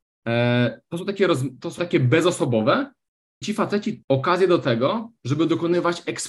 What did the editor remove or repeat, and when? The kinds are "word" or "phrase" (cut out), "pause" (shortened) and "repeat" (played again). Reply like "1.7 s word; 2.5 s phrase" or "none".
1.8 s word; 3.4 s word; 4.0 s word